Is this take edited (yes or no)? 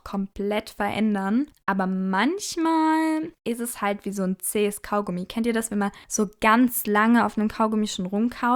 yes